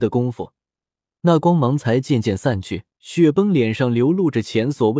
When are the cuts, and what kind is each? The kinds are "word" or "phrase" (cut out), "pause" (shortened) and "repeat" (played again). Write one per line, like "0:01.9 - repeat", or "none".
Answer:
0:02.9 - pause